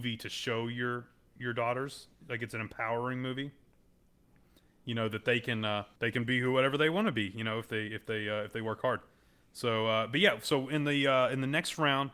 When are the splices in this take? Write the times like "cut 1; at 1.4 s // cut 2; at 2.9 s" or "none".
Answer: cut 1; at 6.0 s